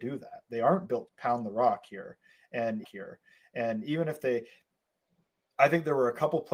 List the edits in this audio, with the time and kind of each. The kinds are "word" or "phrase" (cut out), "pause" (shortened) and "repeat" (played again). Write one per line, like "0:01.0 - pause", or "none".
0:01.1 - word
0:02.8 - repeat
0:05.1 - pause